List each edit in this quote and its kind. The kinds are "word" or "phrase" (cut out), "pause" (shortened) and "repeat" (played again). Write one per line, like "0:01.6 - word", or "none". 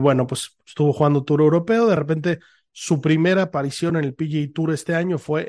none